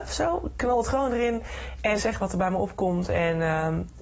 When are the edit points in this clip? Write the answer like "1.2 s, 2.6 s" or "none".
2.0 s